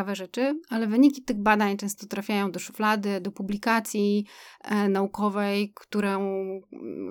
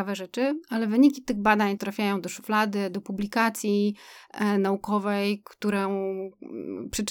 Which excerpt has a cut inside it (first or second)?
second